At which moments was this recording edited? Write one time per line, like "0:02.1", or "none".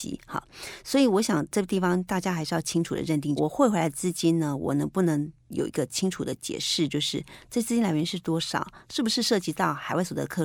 0:03.4